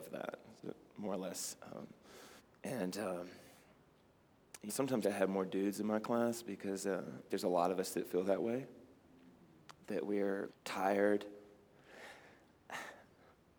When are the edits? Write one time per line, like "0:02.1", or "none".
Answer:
0:02.4
0:04.7
0:05.0
0:07.3
0:10.5